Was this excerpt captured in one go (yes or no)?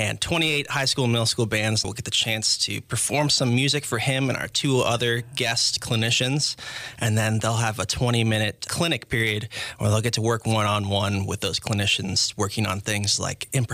no